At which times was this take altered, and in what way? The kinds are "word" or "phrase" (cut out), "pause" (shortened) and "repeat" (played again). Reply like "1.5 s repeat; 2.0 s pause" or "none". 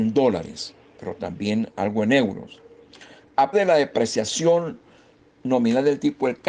3.5 s word